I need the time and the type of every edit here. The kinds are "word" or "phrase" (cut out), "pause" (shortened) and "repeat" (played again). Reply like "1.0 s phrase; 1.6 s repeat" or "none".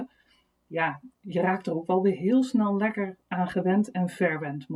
1.1 s pause